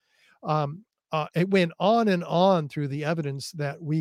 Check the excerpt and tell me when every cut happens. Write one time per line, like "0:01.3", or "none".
none